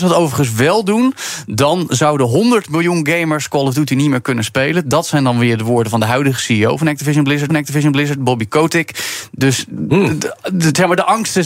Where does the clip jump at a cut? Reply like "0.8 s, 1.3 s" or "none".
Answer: 7.5 s